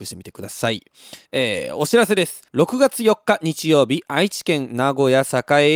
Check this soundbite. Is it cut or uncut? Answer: cut